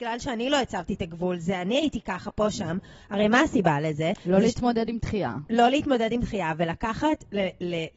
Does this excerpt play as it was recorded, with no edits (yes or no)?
yes